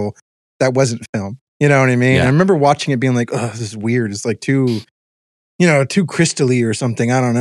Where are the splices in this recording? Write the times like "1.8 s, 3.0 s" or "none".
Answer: 1.5 s